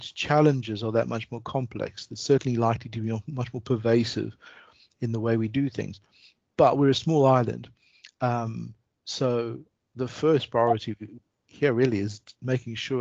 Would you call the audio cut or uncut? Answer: uncut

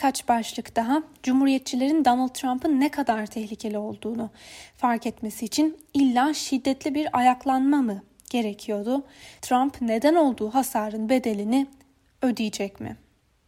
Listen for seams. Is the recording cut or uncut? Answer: uncut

